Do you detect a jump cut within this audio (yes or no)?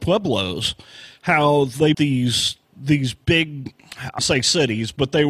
yes